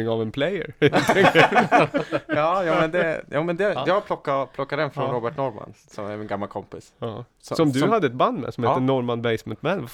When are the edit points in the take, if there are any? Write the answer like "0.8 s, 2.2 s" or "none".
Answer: none